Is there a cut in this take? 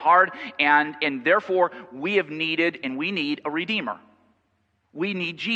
no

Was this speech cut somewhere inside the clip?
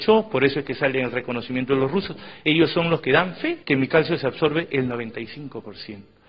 yes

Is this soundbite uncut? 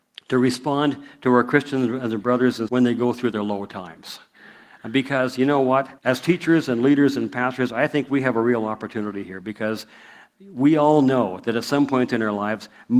no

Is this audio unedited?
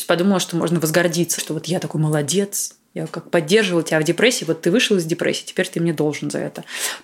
no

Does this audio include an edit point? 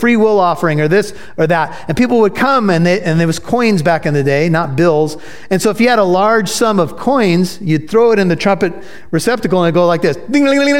no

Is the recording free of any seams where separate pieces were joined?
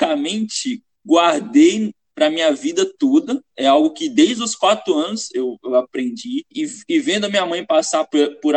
yes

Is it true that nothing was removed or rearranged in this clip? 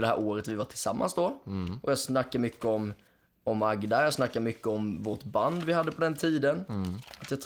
yes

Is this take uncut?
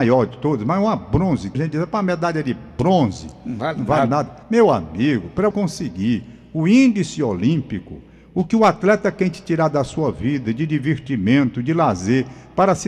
no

